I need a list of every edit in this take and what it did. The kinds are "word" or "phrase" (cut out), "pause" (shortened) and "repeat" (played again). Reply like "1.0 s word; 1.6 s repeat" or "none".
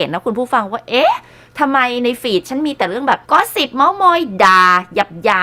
3.2 s pause